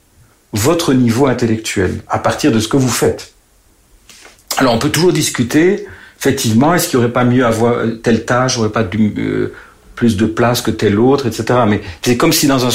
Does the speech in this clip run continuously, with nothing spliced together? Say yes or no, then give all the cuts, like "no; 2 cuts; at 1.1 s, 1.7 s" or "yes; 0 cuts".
yes; 0 cuts